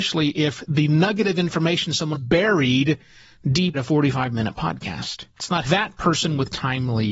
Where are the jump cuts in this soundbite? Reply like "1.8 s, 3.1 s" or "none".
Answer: 2.1 s, 3.7 s, 5.3 s, 5.6 s